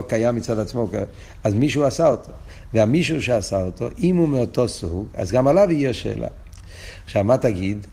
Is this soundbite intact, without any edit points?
yes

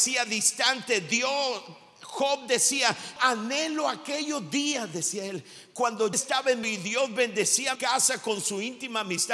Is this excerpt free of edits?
no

